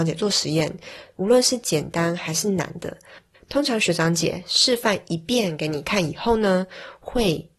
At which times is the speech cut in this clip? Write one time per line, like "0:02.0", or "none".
0:03.3